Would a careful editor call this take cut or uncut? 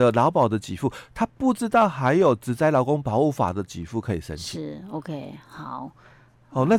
uncut